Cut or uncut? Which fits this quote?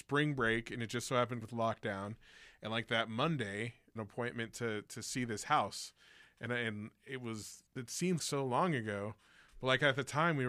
cut